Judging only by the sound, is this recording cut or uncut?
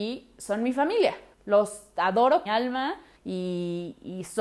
cut